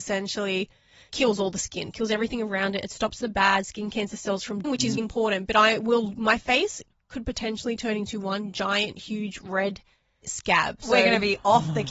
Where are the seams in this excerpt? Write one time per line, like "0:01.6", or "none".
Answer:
0:01.1
0:04.6
0:05.0
0:10.2